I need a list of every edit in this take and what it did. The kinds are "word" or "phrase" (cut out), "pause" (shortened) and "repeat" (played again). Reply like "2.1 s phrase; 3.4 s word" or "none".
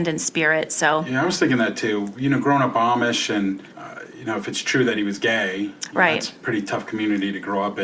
3.7 s pause